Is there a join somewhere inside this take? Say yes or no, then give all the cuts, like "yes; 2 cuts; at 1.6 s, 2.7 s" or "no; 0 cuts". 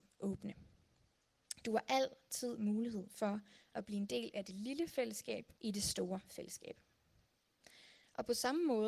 yes; 1 cut; at 5.6 s